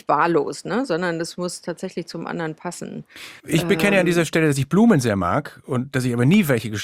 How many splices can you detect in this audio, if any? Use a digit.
1